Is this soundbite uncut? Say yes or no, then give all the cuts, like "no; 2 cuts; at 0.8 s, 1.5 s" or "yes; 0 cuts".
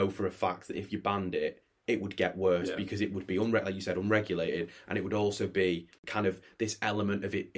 yes; 0 cuts